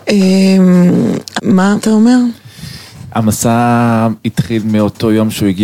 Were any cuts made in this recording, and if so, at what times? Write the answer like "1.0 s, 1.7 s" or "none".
1.4 s, 1.8 s